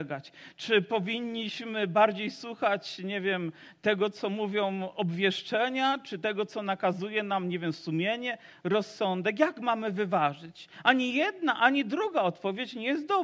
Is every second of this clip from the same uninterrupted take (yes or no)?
yes